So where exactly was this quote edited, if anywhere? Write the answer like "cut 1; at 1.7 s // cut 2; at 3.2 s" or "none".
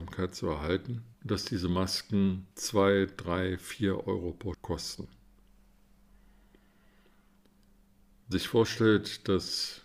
cut 1; at 1.1 s // cut 2; at 2.5 s // cut 3; at 4.5 s // cut 4; at 8.3 s